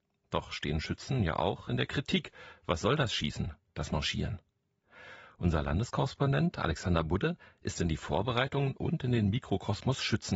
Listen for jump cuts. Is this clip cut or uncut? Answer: uncut